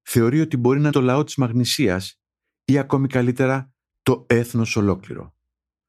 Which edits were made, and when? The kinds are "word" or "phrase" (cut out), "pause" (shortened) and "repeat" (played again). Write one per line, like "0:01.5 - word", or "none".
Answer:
0:00.9 - word